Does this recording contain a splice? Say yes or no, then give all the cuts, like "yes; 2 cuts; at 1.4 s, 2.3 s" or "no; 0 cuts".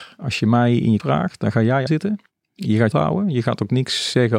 yes; 3 cuts; at 1.0 s, 1.9 s, 2.9 s